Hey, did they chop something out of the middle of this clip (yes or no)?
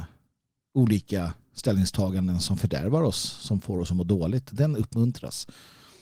no